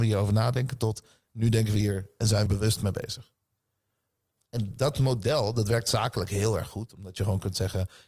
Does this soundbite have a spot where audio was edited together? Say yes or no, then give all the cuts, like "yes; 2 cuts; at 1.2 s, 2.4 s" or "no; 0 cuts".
yes; 1 cut; at 2.5 s